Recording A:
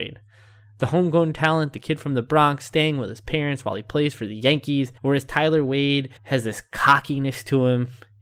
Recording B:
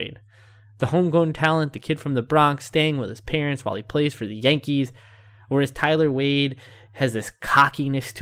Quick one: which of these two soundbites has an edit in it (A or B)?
A